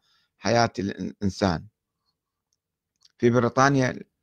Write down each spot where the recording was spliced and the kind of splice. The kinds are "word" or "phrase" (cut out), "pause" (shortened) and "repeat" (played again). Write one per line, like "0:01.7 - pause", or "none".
none